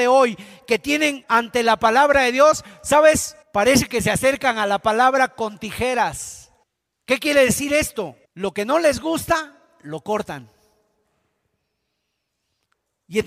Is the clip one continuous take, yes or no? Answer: no